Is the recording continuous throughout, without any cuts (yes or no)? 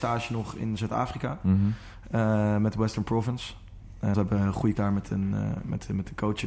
no